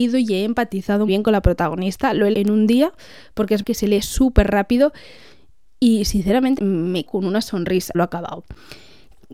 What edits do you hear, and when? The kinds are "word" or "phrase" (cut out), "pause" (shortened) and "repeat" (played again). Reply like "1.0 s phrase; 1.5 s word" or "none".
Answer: 1.1 s word; 2.3 s word; 3.6 s word; 6.6 s word; 7.1 s word; 7.9 s word